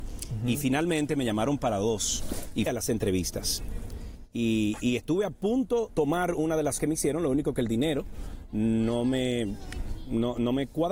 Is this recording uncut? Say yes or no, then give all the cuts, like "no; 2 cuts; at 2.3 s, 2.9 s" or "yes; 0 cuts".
no; 3 cuts; at 2.7 s, 5.9 s, 6.8 s